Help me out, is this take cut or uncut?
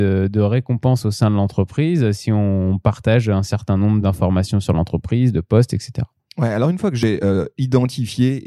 uncut